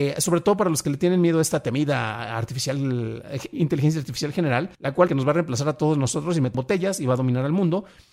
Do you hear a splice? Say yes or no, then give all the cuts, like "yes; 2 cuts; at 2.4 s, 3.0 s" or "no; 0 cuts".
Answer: yes; 4 cuts; at 3.5 s, 4.7 s, 5.1 s, 6.5 s